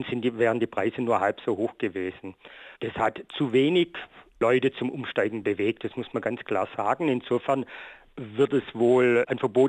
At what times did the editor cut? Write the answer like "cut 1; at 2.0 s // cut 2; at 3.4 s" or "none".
cut 1; at 2.7 s